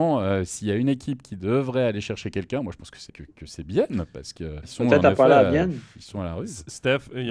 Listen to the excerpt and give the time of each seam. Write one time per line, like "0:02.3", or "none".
0:03.1
0:04.6